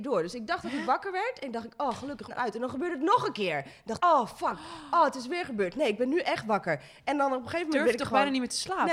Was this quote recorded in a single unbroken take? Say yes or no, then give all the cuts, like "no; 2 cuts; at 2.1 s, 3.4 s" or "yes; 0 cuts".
no; 2 cuts; at 2.3 s, 4.0 s